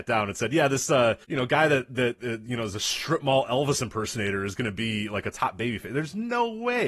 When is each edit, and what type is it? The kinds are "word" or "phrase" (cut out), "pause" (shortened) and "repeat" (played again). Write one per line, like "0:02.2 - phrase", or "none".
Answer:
0:01.2 - pause